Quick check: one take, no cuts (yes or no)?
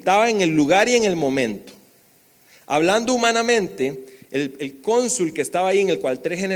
yes